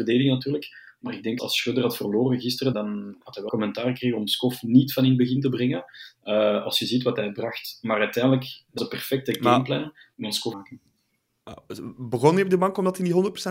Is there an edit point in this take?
yes; 6 cuts; at 1.4 s, 2.7 s, 3.5 s, 8.8 s, 10.1 s, 10.5 s

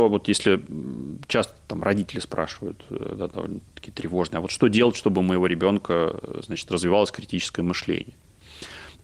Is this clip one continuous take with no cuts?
yes; 0 cuts

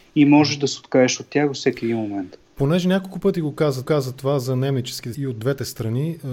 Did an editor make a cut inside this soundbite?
yes; 2 cuts; at 3.8 s, 5.1 s

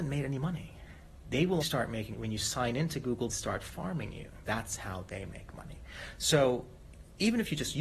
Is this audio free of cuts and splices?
no; 4 cuts; at 1.6 s, 2.1 s, 3.3 s, 4.4 s

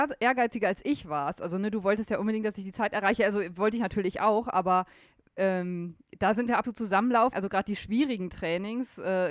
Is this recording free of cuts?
no; 2 cuts; at 6.6 s, 7.3 s

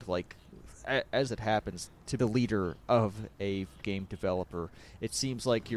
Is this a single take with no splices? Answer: no; 3 cuts; at 1.3 s, 2.2 s, 3.8 s

